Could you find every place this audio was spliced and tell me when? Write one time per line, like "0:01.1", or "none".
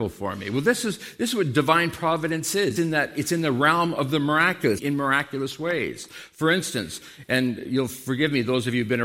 0:02.8
0:04.8